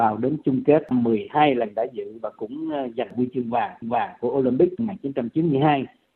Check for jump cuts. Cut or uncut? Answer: cut